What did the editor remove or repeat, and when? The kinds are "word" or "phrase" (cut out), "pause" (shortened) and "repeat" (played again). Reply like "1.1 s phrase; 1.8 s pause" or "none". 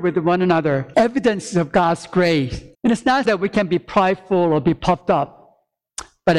0.9 s word; 2.7 s pause; 3.2 s word